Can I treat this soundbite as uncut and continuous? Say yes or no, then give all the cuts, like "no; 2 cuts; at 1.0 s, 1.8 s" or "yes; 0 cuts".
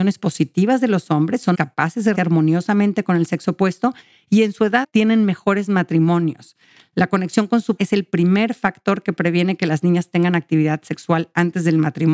no; 4 cuts; at 1.5 s, 2.1 s, 4.8 s, 7.8 s